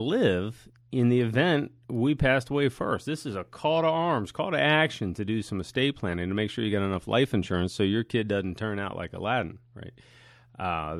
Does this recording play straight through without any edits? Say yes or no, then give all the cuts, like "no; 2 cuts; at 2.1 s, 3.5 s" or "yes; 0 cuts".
yes; 0 cuts